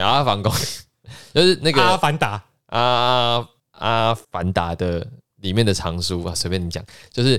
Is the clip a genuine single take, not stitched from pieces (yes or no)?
no